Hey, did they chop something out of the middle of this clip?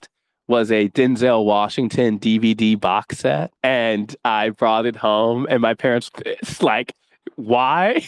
yes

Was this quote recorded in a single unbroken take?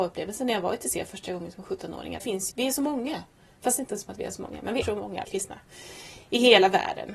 no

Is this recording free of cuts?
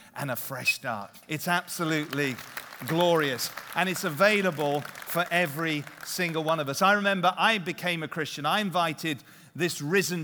no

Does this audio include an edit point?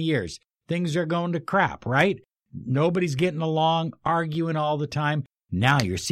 no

